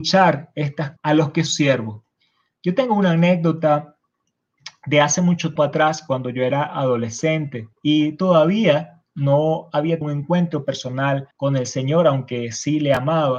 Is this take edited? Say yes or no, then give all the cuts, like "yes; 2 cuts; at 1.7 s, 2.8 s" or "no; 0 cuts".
yes; 6 cuts; at 1.0 s, 1.5 s, 5.6 s, 7.7 s, 10.0 s, 11.3 s